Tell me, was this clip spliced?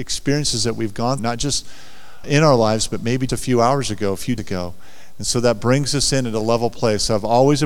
yes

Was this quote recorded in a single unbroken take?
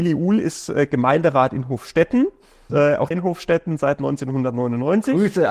no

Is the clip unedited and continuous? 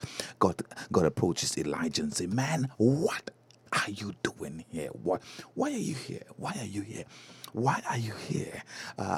yes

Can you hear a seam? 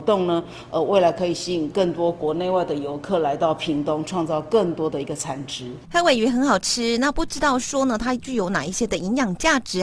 no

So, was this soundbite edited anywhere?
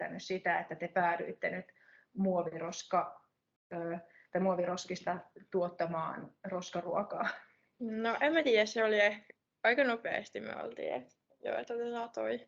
no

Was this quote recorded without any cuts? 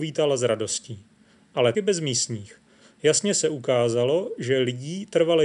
no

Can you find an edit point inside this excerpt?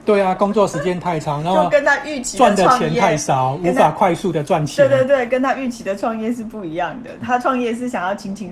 no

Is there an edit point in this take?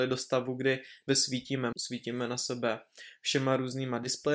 yes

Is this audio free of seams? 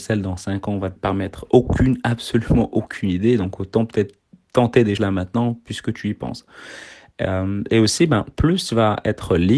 no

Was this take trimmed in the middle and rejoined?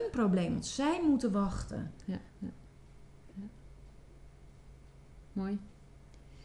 yes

